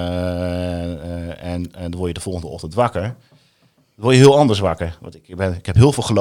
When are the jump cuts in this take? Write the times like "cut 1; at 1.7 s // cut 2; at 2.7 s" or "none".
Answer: none